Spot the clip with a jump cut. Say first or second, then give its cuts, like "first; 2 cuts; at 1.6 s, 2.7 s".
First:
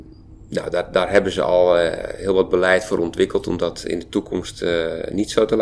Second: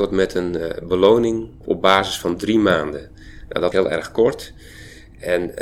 second; 2 cuts; at 1.6 s, 3.7 s